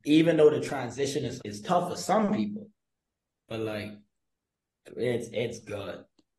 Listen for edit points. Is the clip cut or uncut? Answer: cut